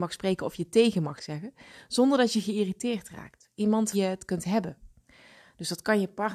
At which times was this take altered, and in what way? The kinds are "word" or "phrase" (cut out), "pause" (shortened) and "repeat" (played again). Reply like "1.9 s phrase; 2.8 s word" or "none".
1.2 s phrase; 3.9 s phrase